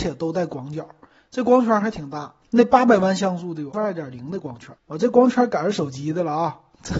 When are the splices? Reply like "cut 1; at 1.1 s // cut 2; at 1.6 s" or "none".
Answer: cut 1; at 2.4 s // cut 2; at 3.7 s // cut 3; at 4.8 s

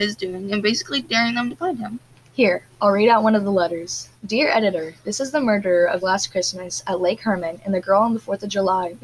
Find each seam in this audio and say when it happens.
cut 1; at 1.5 s // cut 2; at 4.2 s // cut 3; at 6.0 s

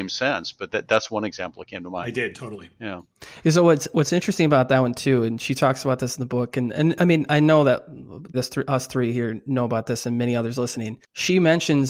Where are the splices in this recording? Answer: cut 1; at 8.3 s

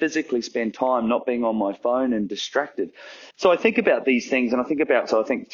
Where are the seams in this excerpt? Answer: cut 1; at 3.3 s

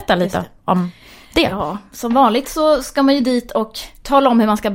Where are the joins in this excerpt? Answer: none

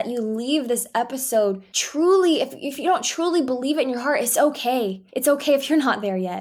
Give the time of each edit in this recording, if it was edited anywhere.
cut 1; at 1.7 s // cut 2; at 5.1 s

